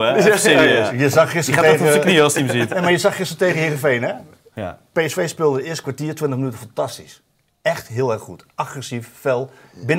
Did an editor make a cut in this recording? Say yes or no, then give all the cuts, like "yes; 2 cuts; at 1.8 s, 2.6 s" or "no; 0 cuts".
no; 0 cuts